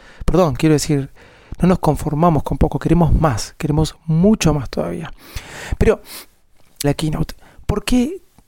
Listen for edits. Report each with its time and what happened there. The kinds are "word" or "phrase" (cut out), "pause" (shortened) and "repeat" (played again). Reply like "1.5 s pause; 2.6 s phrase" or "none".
6.8 s phrase